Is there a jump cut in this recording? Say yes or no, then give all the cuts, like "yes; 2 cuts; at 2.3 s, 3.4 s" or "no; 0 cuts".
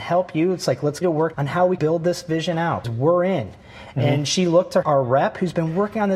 yes; 5 cuts; at 1.0 s, 1.3 s, 1.8 s, 2.8 s, 4.8 s